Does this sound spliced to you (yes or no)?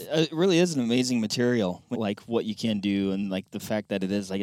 yes